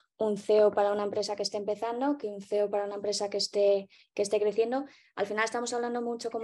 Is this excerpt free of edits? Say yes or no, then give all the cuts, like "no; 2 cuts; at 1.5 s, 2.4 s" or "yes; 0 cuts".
yes; 0 cuts